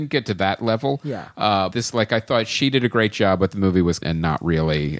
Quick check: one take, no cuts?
no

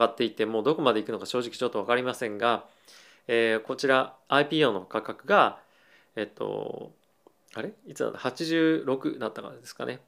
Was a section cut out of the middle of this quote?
no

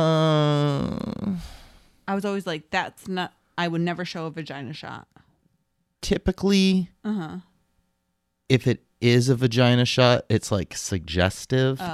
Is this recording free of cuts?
yes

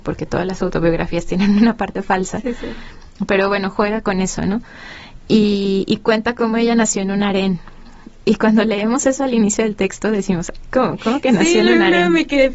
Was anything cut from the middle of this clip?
no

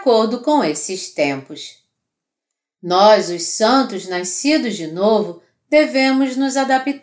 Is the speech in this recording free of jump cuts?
yes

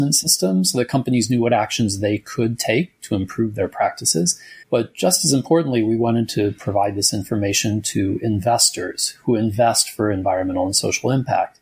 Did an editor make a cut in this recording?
yes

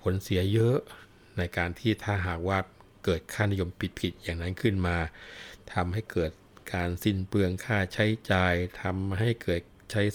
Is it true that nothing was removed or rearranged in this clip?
yes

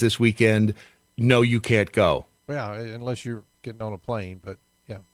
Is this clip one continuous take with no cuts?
yes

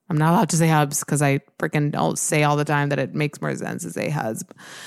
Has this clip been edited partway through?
no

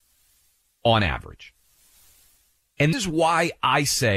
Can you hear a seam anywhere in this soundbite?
yes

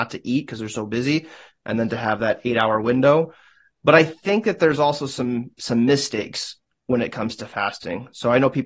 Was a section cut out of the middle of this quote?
no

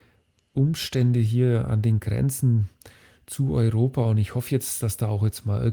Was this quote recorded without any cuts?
yes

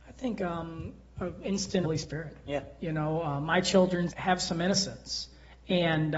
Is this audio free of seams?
no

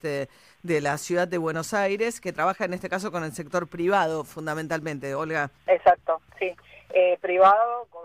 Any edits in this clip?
yes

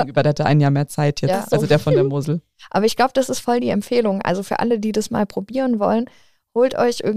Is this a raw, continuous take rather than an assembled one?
yes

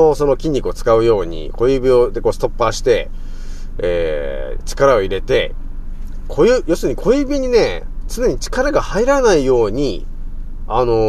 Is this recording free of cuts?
yes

